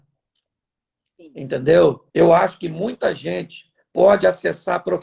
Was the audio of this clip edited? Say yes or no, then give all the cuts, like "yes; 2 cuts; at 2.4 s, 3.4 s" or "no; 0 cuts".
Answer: yes; 1 cut; at 2.1 s